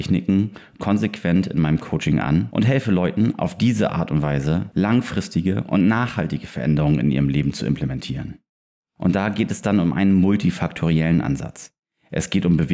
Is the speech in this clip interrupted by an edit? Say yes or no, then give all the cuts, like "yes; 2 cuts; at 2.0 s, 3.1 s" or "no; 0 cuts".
no; 0 cuts